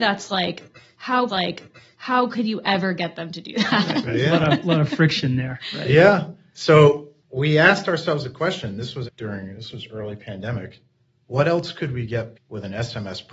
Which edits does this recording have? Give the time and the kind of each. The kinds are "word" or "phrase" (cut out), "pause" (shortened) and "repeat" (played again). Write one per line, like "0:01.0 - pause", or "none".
0:01.3 - repeat
0:07.2 - pause
0:09.1 - word
0:12.3 - phrase